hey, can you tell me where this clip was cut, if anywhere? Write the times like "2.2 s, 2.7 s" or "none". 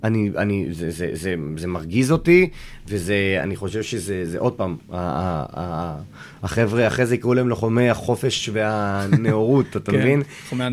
none